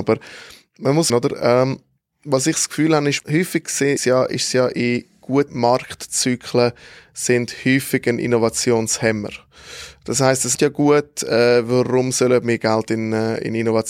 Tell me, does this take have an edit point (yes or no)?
yes